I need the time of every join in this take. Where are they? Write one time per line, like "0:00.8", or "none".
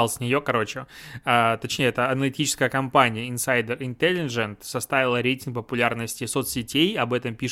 none